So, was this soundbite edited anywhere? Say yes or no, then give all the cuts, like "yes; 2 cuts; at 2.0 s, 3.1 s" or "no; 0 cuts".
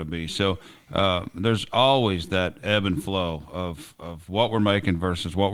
no; 0 cuts